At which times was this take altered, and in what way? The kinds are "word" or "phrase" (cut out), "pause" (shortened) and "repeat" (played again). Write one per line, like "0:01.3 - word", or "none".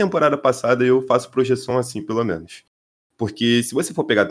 none